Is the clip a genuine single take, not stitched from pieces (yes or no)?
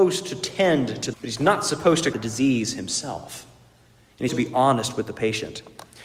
no